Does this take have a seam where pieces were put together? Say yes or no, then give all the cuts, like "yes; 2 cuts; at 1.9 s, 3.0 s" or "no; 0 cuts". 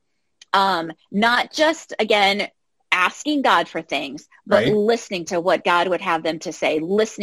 no; 0 cuts